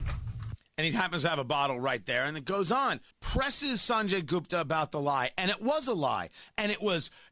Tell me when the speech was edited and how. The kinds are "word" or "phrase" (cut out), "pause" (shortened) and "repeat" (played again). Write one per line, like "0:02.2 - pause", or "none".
0:03.1 - pause